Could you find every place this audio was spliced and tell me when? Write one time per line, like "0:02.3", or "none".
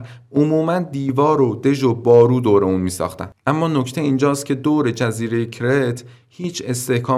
none